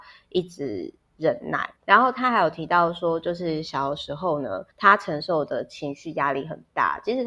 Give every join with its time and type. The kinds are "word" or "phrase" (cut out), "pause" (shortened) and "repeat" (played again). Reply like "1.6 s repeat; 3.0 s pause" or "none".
1.8 s pause; 4.7 s pause